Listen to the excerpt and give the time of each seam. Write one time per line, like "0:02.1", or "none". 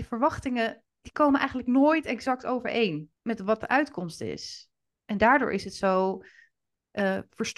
0:01.0
0:03.2